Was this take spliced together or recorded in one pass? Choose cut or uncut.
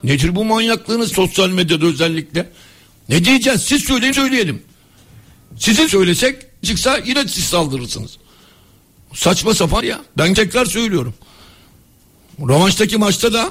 cut